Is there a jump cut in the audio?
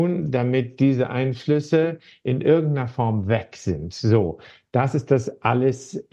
no; 0 cuts

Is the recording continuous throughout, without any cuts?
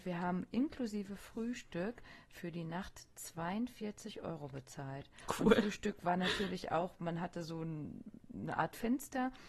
yes; 0 cuts

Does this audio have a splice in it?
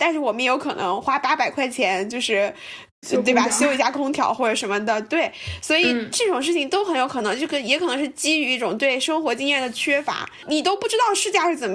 no; 0 cuts

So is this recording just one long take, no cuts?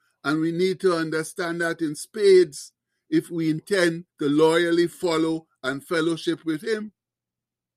no; 1 cut; at 4.1 s

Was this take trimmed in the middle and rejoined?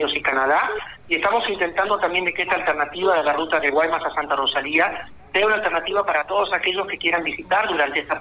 no; 0 cuts

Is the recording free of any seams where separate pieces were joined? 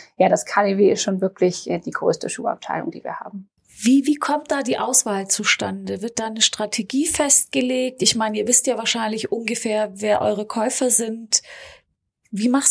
no; 1 cut; at 3.6 s

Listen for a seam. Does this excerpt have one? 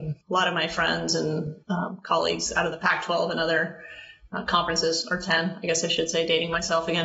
yes; 1 cut; at 1.6 s

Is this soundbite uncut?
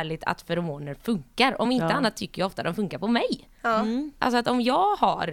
yes; 0 cuts

